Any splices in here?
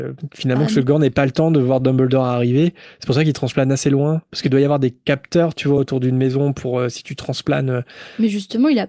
no; 0 cuts

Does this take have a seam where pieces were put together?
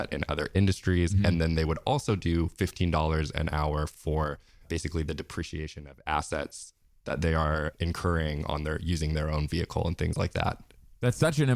no; 0 cuts

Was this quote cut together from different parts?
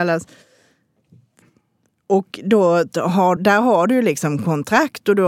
yes; 1 cut; at 3.4 s

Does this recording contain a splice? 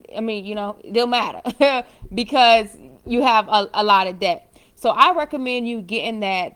no; 0 cuts

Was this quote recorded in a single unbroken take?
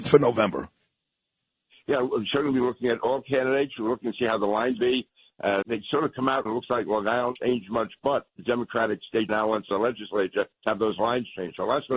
no; 8 cuts; at 4.8 s, 5.6 s, 6.5 s, 7.4 s, 8.3 s, 9.3 s, 9.7 s, 10.6 s

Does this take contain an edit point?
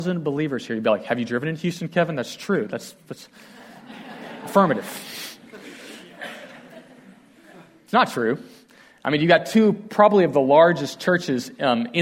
no; 0 cuts

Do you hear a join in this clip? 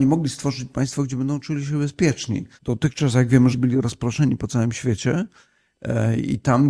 yes; 2 cuts; at 2.6 s, 3.5 s

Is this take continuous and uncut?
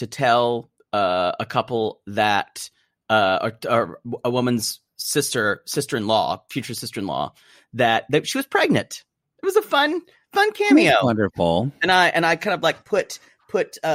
yes; 0 cuts

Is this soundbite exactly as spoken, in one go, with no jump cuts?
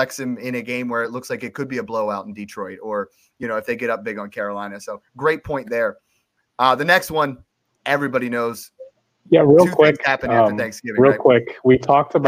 yes; 0 cuts

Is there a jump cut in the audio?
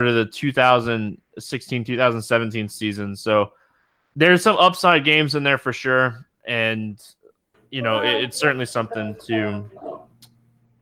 no; 0 cuts

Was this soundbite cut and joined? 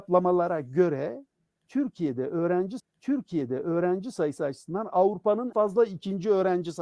yes; 2 cuts; at 2.8 s, 5.5 s

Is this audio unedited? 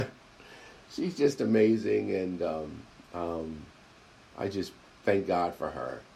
yes; 0 cuts

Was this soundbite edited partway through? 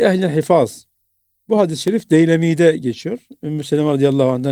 no; 0 cuts

